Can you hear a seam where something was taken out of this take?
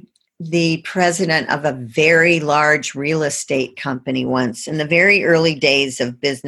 no; 0 cuts

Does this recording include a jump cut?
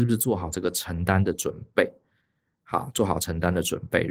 no; 0 cuts

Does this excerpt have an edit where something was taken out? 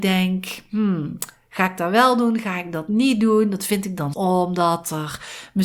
yes; 1 cut; at 4.1 s

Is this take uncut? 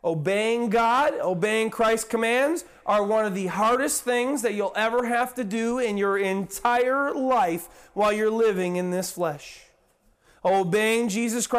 yes; 0 cuts

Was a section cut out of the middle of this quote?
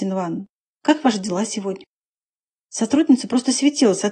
no; 0 cuts

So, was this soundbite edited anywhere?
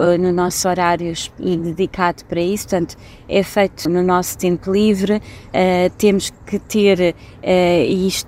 yes; 1 cut; at 3.9 s

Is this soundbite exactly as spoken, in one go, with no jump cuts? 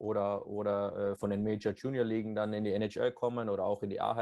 no; 1 cut; at 1.2 s

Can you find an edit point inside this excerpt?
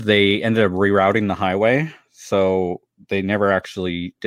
no; 0 cuts

